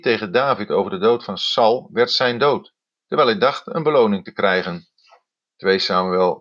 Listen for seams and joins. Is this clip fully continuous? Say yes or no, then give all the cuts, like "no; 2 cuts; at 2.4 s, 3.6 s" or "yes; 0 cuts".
yes; 0 cuts